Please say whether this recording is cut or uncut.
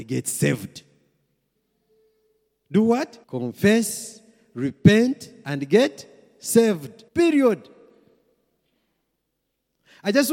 cut